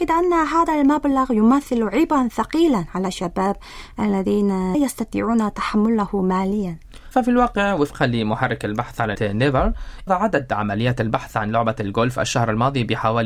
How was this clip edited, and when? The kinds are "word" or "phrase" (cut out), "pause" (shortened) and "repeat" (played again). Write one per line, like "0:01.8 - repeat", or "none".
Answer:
0:04.7 - word
0:07.1 - word
0:09.1 - word
0:10.1 - word